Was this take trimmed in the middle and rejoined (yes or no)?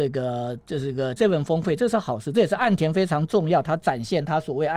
yes